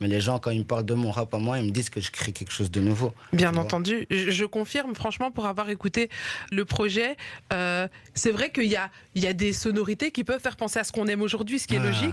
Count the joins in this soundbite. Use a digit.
1